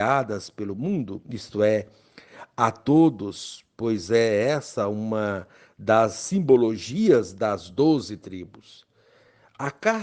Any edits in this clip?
no; 0 cuts

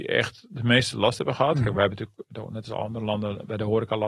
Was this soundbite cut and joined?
no; 0 cuts

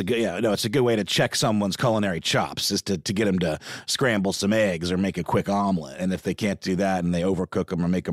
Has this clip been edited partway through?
no; 0 cuts

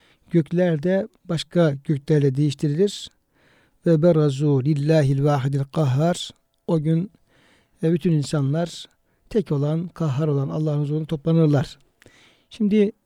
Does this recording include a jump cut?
no; 0 cuts

